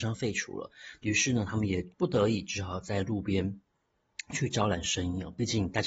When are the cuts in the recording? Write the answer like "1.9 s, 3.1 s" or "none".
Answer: 1.9 s